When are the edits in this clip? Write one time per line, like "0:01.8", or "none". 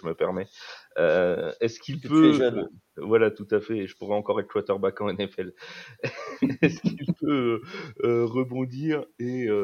none